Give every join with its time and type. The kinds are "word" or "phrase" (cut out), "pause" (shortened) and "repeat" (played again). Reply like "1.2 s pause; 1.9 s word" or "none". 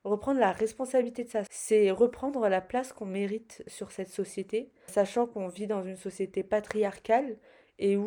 1.5 s word; 4.9 s word